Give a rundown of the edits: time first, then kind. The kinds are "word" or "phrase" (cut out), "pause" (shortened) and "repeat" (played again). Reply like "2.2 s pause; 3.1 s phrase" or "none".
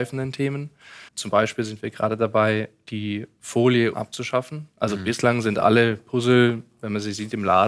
1.1 s pause; 3.9 s phrase